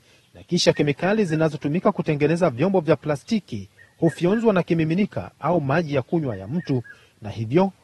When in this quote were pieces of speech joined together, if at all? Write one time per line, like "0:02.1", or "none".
none